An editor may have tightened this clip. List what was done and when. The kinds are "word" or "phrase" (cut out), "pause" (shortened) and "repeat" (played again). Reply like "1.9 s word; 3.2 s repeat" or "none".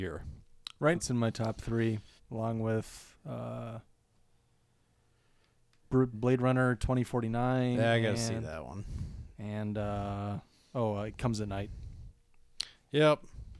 0.9 s word; 2.2 s pause; 6.1 s word; 10.5 s pause